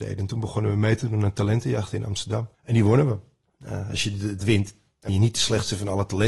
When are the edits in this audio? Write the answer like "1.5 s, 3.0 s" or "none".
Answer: 2.5 s, 4.4 s, 5.1 s